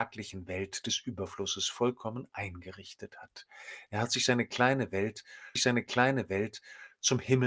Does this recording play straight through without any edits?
no; 1 cut; at 5.6 s

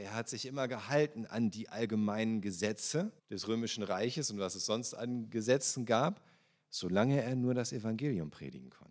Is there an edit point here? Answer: yes; 1 cut; at 3.2 s

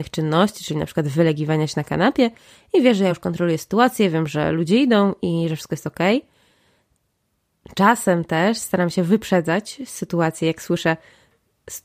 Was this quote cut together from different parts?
no; 0 cuts

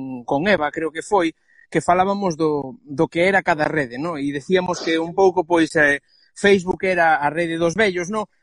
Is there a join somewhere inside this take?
no; 0 cuts

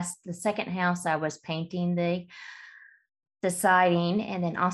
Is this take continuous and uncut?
yes; 0 cuts

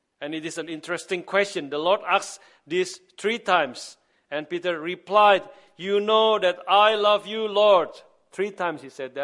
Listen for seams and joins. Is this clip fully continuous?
yes; 0 cuts

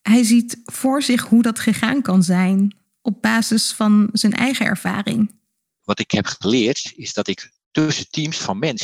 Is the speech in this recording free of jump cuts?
yes; 0 cuts

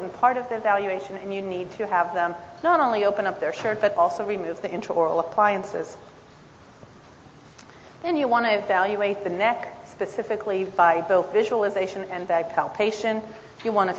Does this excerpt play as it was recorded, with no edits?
yes; 0 cuts

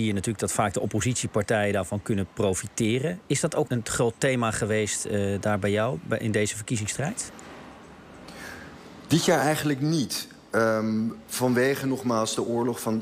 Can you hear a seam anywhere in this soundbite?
yes; 1 cut; at 3.7 s

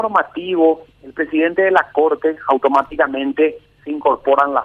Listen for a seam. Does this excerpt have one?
no; 0 cuts

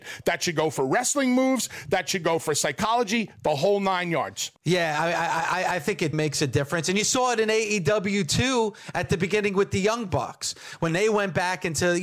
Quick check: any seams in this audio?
yes; 2 cuts; at 4.6 s, 6.1 s

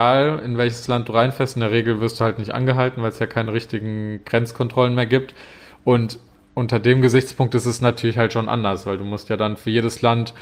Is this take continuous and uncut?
yes; 0 cuts

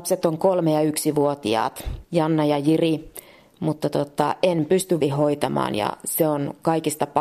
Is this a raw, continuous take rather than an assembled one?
no; 2 cuts; at 2.0 s, 5.0 s

